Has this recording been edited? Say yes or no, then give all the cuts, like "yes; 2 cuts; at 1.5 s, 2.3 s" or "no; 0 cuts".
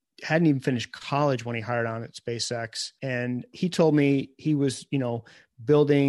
no; 0 cuts